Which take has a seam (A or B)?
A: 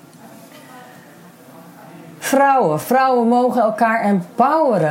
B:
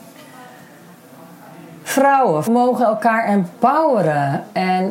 B